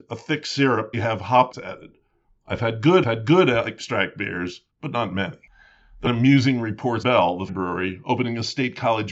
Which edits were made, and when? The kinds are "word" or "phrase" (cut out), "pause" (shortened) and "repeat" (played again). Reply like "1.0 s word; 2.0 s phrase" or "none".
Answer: 0.9 s phrase; 1.5 s word; 3.0 s repeat; 4.7 s pause; 6.1 s phrase; 7.0 s phrase; 7.5 s word

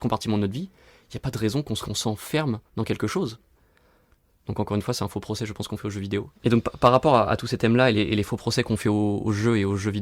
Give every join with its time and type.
1.8 s phrase; 2.7 s pause; 6.4 s pause

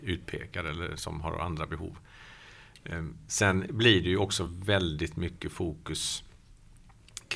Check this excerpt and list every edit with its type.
none

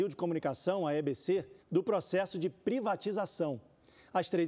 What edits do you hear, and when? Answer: 1.6 s pause

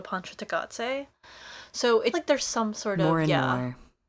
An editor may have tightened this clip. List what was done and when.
2.1 s word

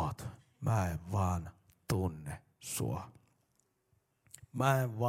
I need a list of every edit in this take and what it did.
none

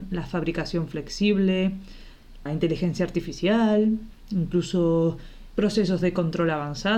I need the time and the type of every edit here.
2.5 s word

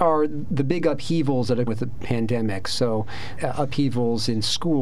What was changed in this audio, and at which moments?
1.7 s word; 3.4 s word

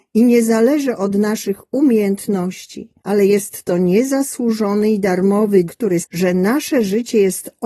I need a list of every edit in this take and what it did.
3.0 s pause; 5.7 s word; 6.0 s word

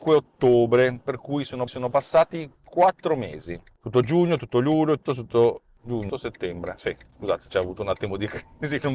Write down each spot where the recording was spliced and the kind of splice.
1.7 s repeat; 5.1 s word; 6.1 s phrase

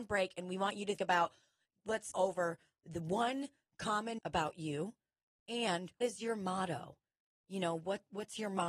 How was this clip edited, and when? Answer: 1.0 s word; 2.1 s word; 4.2 s word; 6.0 s word

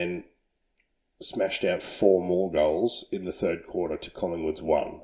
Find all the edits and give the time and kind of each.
none

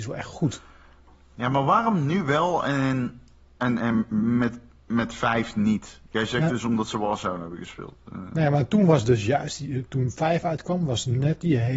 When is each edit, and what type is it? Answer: none

